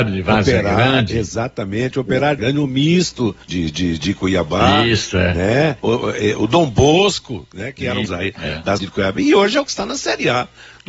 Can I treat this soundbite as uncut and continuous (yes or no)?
no